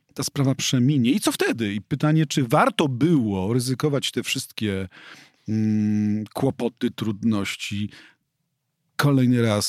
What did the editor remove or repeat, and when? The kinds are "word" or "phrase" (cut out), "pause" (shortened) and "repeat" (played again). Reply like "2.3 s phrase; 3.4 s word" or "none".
none